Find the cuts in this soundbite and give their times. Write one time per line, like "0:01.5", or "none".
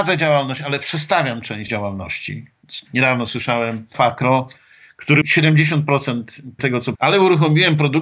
0:01.7
0:03.9
0:05.2
0:06.6
0:06.9